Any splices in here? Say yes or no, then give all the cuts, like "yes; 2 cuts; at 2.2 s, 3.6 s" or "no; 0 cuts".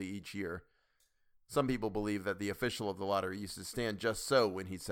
no; 0 cuts